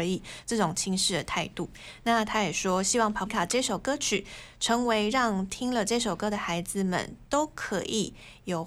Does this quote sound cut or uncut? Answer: cut